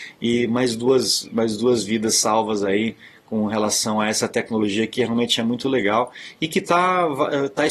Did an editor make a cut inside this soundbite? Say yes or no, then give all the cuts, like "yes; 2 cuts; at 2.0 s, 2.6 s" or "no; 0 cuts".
no; 0 cuts